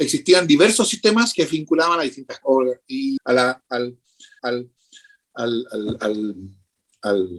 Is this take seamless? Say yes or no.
no